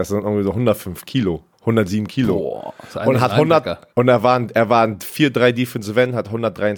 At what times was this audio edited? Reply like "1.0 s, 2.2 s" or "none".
1.5 s, 3.9 s